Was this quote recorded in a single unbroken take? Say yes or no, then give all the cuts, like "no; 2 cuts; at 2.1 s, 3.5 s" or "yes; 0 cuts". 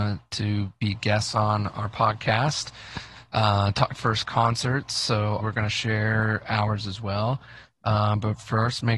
no; 2 cuts; at 3.9 s, 5.4 s